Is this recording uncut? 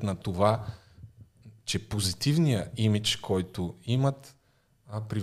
yes; 0 cuts

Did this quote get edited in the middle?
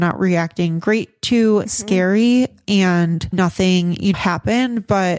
yes; 3 cuts; at 1.7 s, 3.3 s, 4.1 s

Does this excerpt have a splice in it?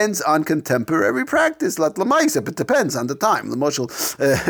no; 0 cuts

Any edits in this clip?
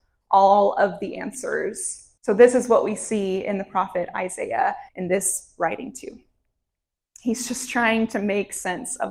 yes; 2 cuts; at 2.2 s, 4.9 s

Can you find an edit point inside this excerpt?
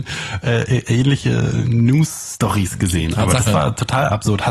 no; 0 cuts

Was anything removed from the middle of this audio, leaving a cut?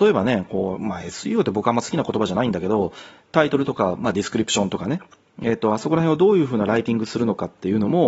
no; 0 cuts

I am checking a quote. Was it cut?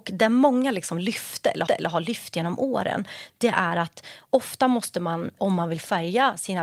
yes; 2 cuts; at 1.7 s, 5.4 s

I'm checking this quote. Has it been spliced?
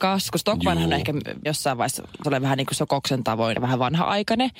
yes; 4 cuts; at 1.5 s, 2.2 s, 2.8 s, 3.5 s

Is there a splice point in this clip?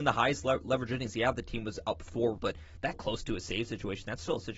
yes; 2 cuts; at 2.4 s, 2.9 s

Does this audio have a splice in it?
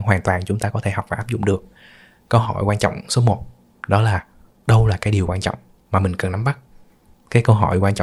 no; 0 cuts

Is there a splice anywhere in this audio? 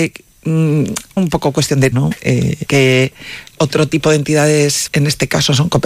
yes; 5 cuts; at 1.2 s, 1.9 s, 2.7 s, 3.5 s, 4.9 s

